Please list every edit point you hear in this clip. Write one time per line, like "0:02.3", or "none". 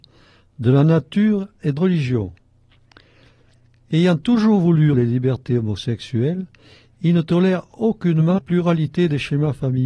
0:01.8
0:04.9
0:08.4